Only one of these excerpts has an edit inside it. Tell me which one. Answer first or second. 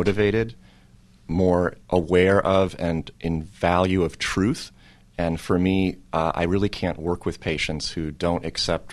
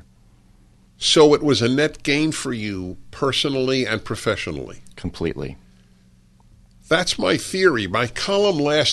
first